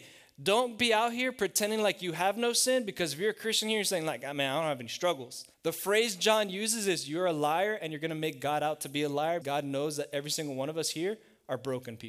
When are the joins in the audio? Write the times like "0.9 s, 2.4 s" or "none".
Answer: 5.5 s, 9.4 s